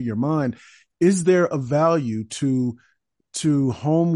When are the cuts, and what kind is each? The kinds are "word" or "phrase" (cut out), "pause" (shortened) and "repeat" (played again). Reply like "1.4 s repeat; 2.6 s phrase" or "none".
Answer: none